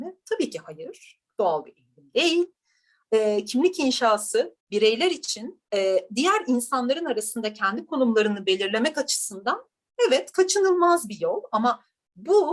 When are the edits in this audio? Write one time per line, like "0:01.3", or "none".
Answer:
0:04.6
0:05.6